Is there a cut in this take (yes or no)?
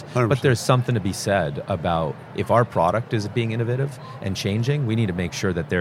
no